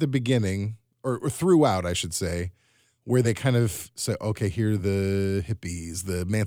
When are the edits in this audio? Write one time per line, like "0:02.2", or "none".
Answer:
none